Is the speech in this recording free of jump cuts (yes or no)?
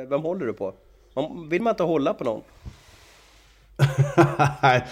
yes